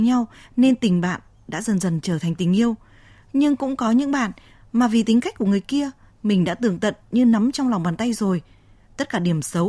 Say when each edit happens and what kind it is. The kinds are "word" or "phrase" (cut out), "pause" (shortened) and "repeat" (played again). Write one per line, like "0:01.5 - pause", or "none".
none